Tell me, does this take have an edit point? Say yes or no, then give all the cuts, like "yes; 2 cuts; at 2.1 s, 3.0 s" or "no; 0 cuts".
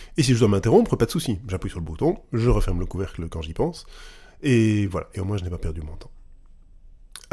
no; 0 cuts